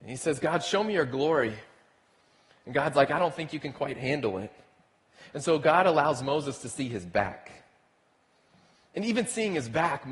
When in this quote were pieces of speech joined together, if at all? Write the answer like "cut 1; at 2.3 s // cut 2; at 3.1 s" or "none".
none